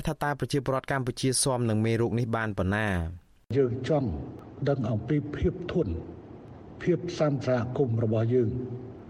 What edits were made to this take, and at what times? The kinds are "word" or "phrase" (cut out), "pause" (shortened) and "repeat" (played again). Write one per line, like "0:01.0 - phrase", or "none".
none